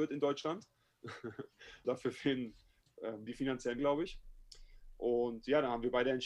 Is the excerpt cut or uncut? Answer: cut